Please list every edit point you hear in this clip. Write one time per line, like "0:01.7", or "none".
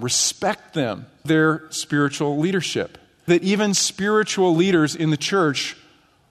0:01.2
0:03.3